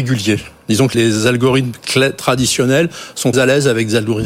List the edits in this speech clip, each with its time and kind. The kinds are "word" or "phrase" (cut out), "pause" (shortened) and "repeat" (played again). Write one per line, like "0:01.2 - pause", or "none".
0:00.9 - word
0:03.3 - word